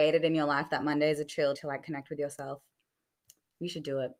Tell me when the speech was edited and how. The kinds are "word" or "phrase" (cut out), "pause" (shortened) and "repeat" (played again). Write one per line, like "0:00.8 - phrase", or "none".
0:01.5 - word